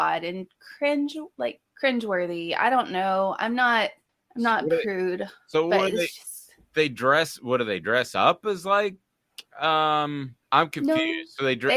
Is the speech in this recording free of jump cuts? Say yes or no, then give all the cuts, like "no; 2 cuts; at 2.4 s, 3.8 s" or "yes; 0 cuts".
no; 3 cuts; at 1.7 s, 4.1 s, 10.4 s